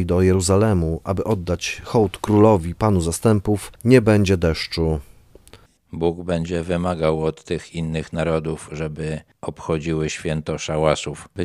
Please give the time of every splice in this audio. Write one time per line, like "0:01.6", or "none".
0:03.7
0:05.8